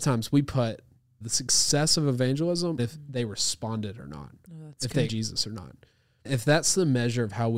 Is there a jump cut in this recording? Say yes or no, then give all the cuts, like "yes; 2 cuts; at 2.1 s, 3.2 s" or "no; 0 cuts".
yes; 4 cuts; at 1.2 s, 2.8 s, 5.1 s, 6.2 s